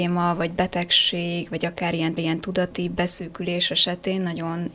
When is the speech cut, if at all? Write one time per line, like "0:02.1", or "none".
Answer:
0:02.2